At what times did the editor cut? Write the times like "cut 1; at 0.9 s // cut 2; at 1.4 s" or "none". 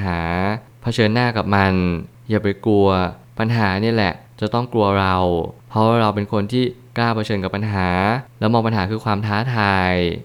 none